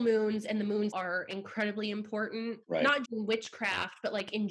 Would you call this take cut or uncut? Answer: cut